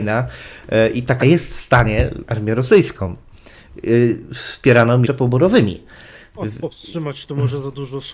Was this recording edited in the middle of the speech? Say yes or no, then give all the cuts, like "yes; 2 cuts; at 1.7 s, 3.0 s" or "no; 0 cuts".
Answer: yes; 3 cuts; at 1.2 s, 2.3 s, 5.0 s